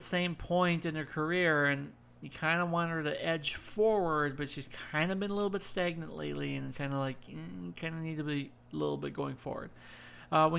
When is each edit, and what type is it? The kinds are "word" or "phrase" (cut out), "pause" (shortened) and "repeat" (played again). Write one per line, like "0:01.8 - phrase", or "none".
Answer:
0:06.7 - word
0:08.6 - pause